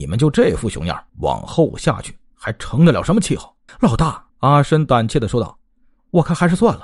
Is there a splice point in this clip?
yes; 3 cuts; at 1.1 s, 3.7 s, 4.3 s

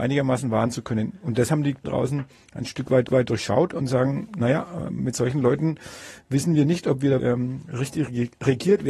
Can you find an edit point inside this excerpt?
yes; 3 cuts; at 1.8 s, 3.1 s, 7.2 s

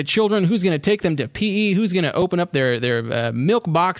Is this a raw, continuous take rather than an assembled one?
yes; 0 cuts

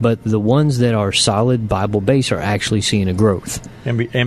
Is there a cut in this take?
no; 0 cuts

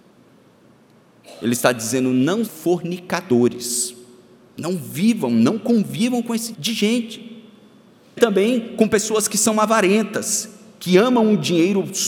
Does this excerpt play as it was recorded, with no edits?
no; 3 cuts; at 2.5 s, 6.5 s, 8.2 s

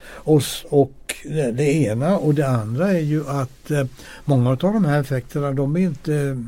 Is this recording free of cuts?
yes; 0 cuts

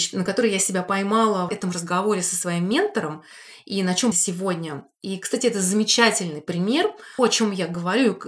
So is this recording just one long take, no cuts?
no; 3 cuts; at 1.5 s, 4.1 s, 7.2 s

